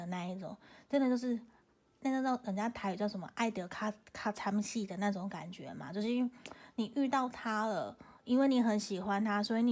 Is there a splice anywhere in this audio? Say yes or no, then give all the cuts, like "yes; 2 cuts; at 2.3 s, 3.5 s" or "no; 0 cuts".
no; 0 cuts